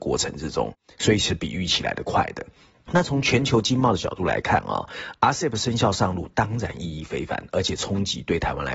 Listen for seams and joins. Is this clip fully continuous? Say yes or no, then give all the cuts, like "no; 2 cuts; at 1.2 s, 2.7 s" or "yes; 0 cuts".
yes; 0 cuts